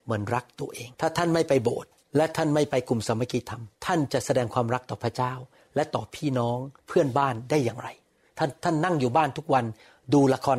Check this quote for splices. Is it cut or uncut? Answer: cut